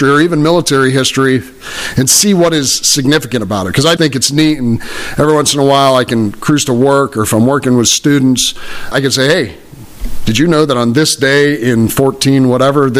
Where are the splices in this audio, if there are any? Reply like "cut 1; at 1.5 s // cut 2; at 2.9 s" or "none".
cut 1; at 4.0 s // cut 2; at 8.9 s